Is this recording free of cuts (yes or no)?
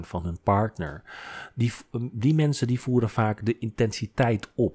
yes